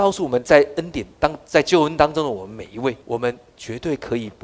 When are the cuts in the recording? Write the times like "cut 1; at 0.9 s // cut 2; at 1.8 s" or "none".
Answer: cut 1; at 3.0 s